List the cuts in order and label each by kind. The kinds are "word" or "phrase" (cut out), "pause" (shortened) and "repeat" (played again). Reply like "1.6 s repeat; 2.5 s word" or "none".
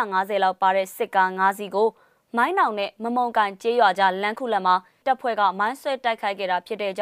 5.0 s word

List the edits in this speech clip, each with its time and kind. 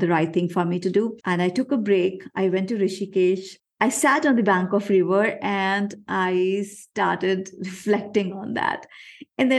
1.2 s pause

